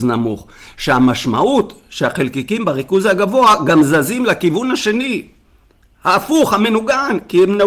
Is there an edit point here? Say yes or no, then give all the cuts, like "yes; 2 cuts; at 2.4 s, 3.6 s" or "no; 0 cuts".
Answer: no; 0 cuts